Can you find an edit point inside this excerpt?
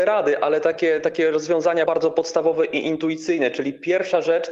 yes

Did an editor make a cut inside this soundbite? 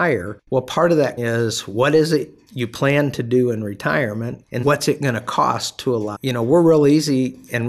yes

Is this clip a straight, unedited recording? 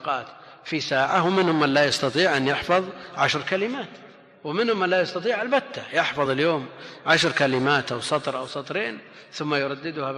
yes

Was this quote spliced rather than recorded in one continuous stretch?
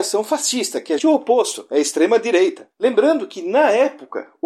yes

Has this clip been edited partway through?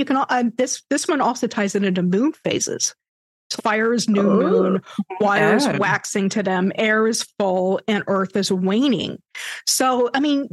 yes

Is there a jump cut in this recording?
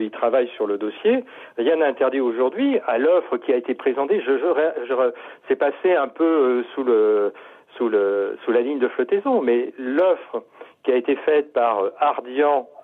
no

